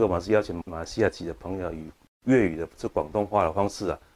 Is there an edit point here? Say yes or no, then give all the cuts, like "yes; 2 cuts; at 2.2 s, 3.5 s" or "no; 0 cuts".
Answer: no; 0 cuts